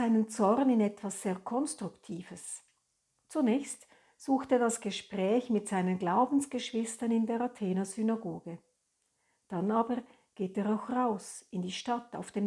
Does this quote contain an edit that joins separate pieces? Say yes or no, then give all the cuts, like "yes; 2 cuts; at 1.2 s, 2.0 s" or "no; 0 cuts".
no; 0 cuts